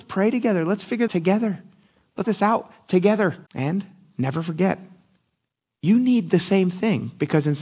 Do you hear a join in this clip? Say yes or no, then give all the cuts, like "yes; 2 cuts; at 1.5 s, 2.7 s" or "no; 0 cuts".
yes; 3 cuts; at 1.1 s, 2.2 s, 3.5 s